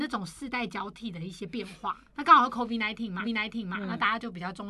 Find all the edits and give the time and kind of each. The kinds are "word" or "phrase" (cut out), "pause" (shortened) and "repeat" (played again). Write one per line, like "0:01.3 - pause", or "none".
0:02.1 - pause
0:03.2 - repeat